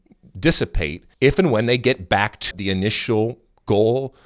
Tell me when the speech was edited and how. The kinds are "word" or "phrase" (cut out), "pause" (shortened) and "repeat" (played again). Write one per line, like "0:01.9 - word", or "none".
0:01.1 - pause
0:02.5 - word